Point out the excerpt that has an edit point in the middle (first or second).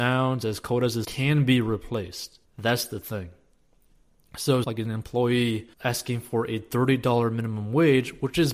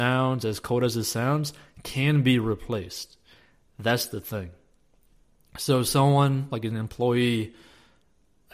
first